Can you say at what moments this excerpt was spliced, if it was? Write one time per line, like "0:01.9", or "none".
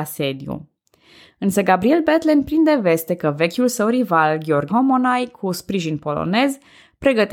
0:04.7

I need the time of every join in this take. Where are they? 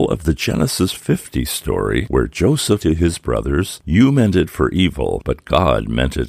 0:02.8

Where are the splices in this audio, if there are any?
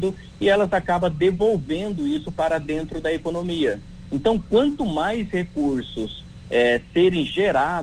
none

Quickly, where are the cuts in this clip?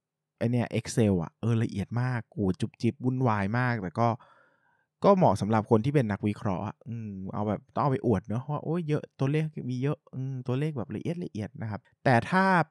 none

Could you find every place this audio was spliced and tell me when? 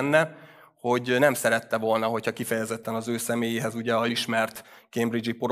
0:04.1

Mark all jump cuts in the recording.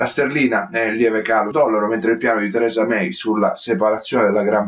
0:01.5

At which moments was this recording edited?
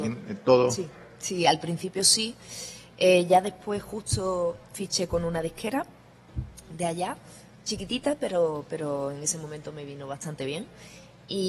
none

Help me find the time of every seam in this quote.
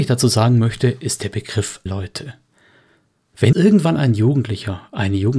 0:01.9
0:03.5

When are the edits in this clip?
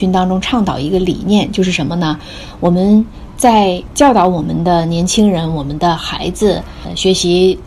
none

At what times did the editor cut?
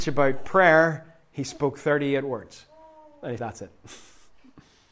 0:03.4

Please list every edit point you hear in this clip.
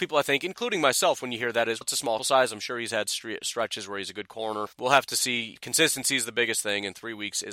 0:01.8
0:02.2
0:04.7
0:05.6

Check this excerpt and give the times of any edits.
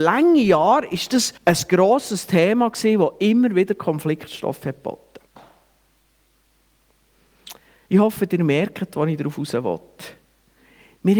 0:01.4
0:05.3

